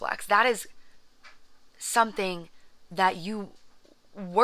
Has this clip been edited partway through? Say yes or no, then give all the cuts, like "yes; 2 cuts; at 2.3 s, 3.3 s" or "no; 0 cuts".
no; 0 cuts